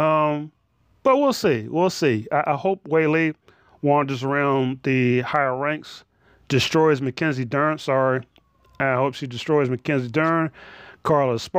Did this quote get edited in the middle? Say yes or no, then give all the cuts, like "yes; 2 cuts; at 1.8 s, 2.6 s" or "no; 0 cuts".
no; 0 cuts